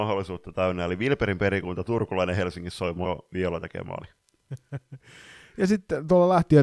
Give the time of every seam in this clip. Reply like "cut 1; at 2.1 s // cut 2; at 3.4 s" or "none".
cut 1; at 3.0 s

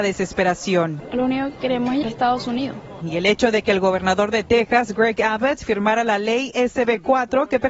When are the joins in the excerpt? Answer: cut 1; at 1.6 s // cut 2; at 2.0 s

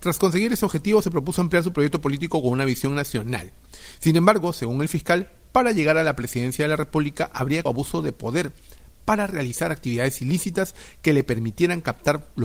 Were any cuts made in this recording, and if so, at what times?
cut 1; at 7.7 s

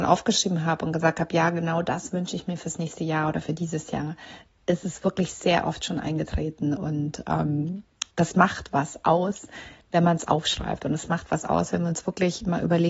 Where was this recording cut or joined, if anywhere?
cut 1; at 8.1 s

